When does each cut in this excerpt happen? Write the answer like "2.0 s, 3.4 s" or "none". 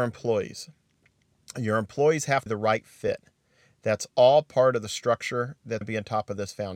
2.5 s, 5.8 s

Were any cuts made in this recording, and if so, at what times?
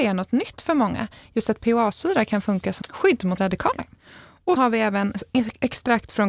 2.8 s, 3.4 s, 4.6 s

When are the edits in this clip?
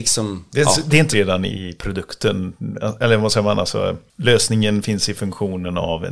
1.1 s, 1.5 s

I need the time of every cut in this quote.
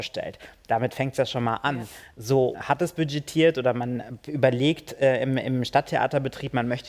2.5 s

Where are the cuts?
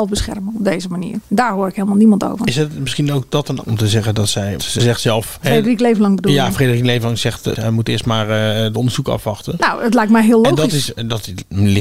3.6 s, 4.6 s

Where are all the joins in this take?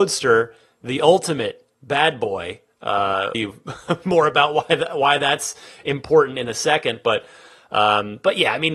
1.7 s, 3.3 s

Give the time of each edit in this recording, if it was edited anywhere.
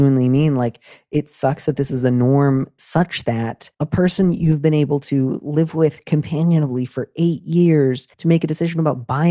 3.7 s, 8.1 s

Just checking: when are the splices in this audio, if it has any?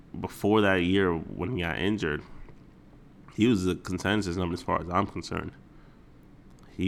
4.5 s

